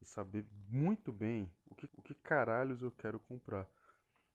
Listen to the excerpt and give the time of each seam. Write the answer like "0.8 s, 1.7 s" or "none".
1.9 s